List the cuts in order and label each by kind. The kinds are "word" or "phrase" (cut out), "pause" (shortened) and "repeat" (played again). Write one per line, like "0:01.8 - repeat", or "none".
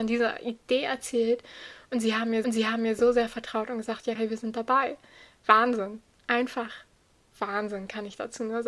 0:02.4 - repeat
0:04.2 - word